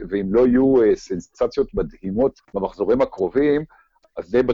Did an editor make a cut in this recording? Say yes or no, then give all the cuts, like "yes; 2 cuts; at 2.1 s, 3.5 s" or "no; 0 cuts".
yes; 1 cut; at 2.4 s